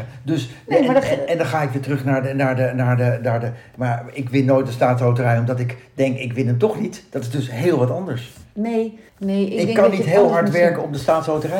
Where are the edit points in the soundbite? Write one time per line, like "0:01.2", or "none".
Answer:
0:09.1